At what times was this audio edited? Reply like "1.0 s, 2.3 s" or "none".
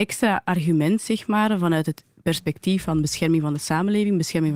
none